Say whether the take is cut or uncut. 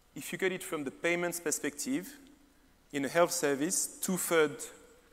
uncut